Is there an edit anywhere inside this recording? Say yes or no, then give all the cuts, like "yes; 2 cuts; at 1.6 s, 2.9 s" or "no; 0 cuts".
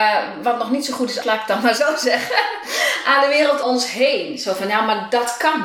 yes; 2 cuts; at 1.2 s, 3.6 s